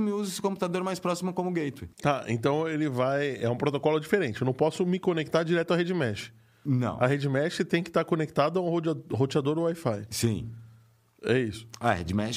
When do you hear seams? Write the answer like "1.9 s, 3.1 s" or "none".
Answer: 1.9 s